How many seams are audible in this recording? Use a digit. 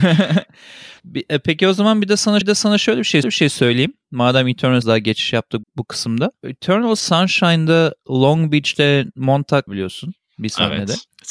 6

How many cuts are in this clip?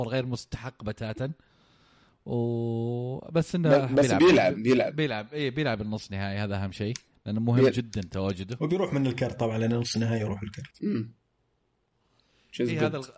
0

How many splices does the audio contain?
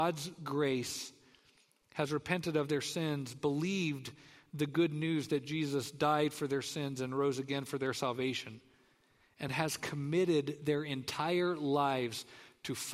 0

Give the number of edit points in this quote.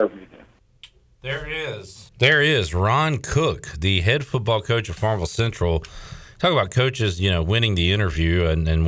1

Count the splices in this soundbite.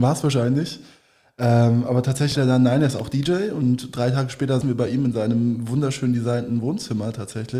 2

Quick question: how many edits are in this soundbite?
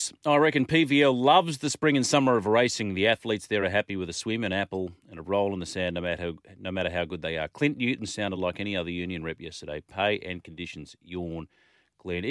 0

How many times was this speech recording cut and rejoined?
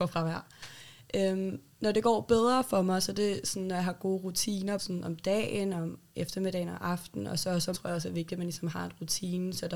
3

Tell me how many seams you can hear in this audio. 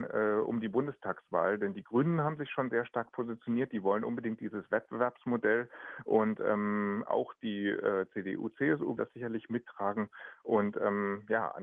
1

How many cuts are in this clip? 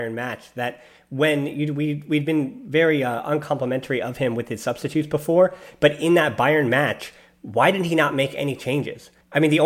0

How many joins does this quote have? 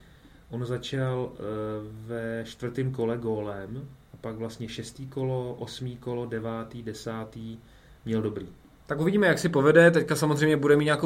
0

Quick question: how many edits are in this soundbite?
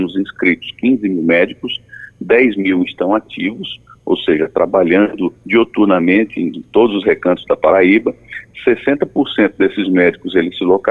2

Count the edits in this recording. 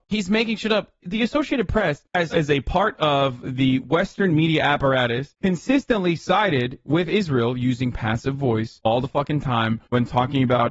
1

